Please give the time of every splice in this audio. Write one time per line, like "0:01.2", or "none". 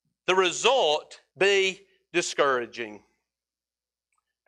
0:01.3